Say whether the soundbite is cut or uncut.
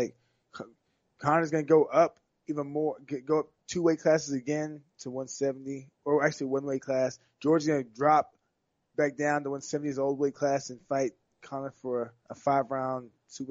cut